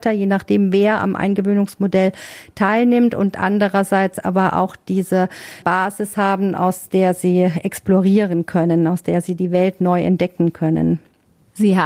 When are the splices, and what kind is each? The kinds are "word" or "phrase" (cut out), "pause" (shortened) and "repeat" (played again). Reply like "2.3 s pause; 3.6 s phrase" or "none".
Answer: none